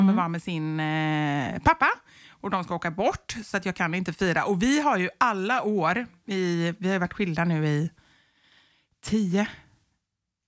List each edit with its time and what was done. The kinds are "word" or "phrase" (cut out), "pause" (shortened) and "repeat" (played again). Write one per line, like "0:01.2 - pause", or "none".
none